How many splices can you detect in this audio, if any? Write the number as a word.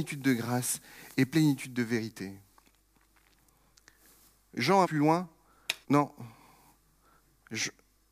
two